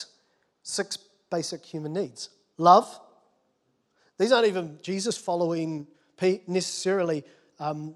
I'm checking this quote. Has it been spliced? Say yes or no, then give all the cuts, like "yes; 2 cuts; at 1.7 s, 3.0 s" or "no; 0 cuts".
no; 0 cuts